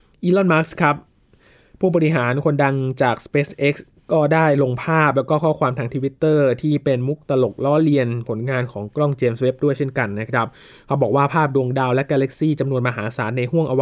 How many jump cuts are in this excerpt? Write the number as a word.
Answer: zero